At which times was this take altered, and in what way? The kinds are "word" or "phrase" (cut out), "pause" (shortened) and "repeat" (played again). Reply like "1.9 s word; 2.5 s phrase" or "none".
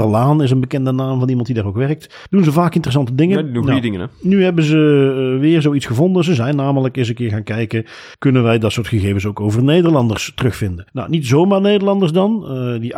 2.3 s pause; 8.1 s pause; 10.9 s pause